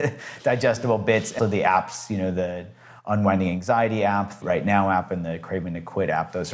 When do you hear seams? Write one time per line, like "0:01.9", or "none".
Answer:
0:01.4
0:04.4